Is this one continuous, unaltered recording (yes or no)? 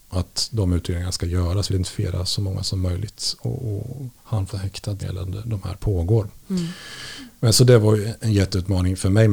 no